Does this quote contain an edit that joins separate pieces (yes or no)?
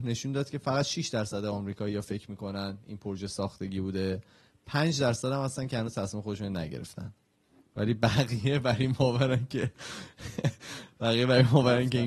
no